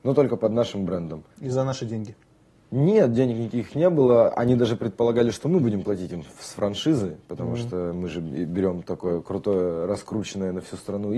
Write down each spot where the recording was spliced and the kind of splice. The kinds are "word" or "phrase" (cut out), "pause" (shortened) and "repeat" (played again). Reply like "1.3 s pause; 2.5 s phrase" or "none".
1.3 s pause